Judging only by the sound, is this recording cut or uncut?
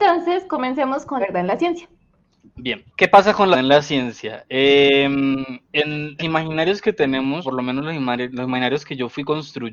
cut